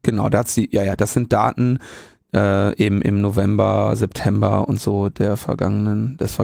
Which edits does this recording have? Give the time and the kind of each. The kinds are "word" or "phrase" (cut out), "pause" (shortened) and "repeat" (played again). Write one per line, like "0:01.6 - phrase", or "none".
none